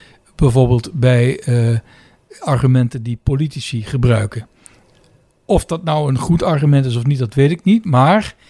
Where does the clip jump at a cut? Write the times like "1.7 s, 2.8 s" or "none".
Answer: none